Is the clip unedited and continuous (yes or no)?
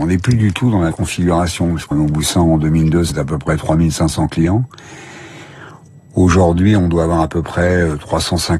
no